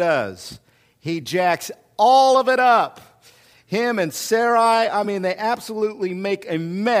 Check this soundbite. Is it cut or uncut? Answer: uncut